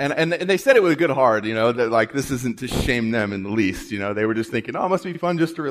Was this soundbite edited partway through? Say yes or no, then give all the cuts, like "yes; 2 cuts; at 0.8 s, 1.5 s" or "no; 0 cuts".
no; 0 cuts